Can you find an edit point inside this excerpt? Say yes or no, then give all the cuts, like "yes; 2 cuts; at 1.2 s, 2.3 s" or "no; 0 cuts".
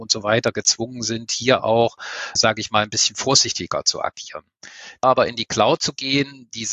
yes; 2 cuts; at 2.4 s, 5.0 s